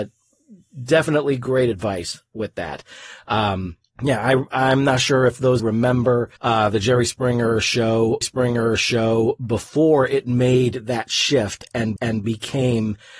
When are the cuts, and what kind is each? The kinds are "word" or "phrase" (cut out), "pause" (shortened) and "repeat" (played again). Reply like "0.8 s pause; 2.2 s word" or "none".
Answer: 3.9 s pause; 5.6 s phrase; 6.4 s pause; 8.2 s repeat; 12.0 s repeat